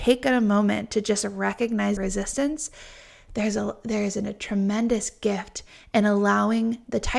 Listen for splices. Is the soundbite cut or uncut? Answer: cut